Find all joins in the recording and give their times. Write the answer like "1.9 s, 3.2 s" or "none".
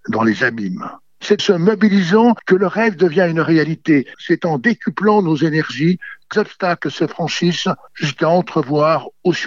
1.4 s, 6.3 s